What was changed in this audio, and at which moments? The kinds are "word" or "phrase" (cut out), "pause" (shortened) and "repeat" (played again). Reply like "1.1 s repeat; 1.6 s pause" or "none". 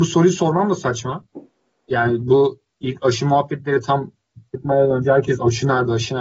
none